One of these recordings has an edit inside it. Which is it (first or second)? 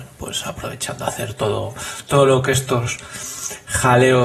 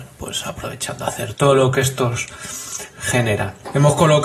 second